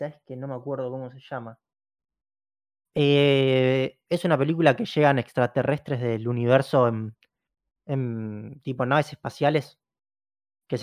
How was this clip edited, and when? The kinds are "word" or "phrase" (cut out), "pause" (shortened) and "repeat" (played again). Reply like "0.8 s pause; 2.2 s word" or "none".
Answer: none

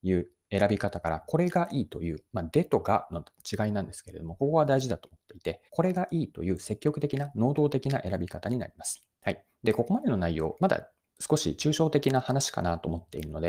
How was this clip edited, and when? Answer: 5.7 s pause; 9.1 s pause

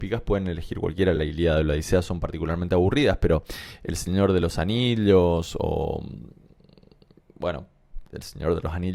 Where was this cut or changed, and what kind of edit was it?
none

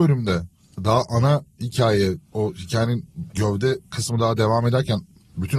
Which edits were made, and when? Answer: none

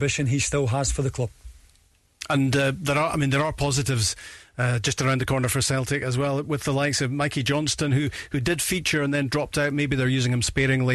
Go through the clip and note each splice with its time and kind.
none

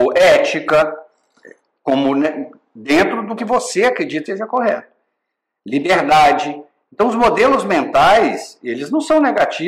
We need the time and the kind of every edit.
3.4 s word; 4.3 s word

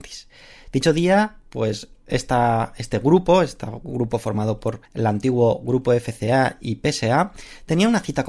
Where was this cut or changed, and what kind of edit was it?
4.9 s pause

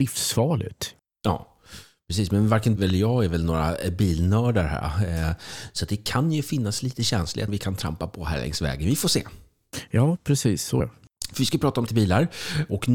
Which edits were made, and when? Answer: 2.8 s word; 7.5 s word; 10.8 s word; 11.9 s word

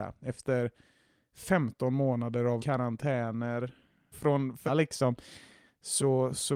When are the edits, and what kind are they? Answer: 2.6 s word; 4.1 s word; 4.7 s word

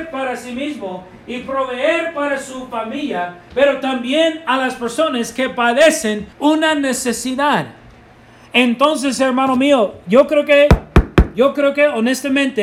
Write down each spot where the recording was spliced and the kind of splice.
6.3 s pause

